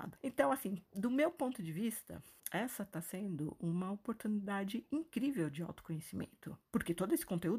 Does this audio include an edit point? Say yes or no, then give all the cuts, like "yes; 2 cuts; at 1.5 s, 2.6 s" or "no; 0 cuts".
yes; 1 cut; at 2.4 s